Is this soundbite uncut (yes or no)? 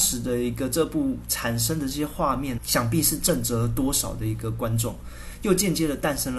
no